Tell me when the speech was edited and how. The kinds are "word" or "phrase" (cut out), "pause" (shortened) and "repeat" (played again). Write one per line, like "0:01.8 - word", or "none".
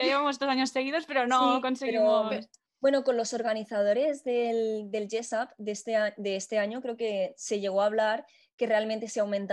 none